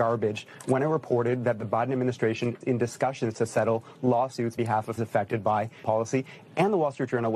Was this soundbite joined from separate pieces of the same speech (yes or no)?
yes